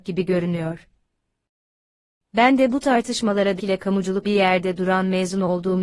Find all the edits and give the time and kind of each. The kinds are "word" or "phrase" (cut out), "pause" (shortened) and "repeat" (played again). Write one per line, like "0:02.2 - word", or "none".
0:03.6 - word
0:04.2 - word